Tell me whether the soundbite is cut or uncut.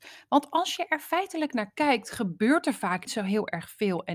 cut